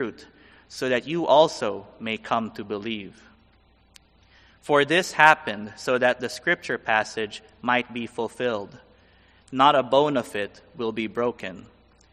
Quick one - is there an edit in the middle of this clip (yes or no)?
no